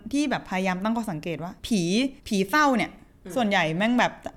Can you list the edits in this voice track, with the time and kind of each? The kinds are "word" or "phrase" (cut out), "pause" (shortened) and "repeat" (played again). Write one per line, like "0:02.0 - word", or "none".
0:01.6 - pause
0:02.2 - pause